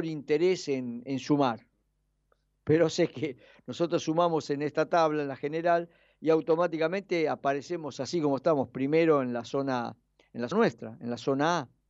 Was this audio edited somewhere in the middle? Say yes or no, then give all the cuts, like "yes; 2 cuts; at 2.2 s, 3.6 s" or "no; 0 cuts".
yes; 1 cut; at 10.5 s